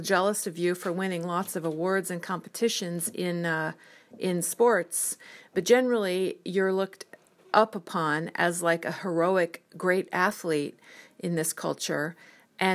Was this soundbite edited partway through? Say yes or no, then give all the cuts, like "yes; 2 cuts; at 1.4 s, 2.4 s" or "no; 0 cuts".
no; 0 cuts